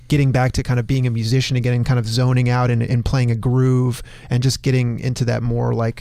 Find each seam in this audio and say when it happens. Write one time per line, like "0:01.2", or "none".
none